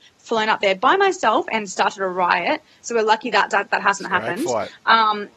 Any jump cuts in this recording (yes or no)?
no